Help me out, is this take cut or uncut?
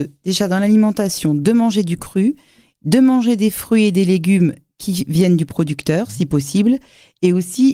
uncut